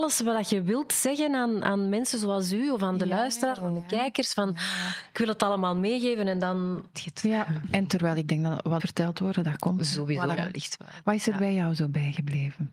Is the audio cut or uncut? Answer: cut